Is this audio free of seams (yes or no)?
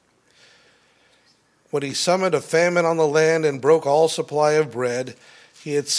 yes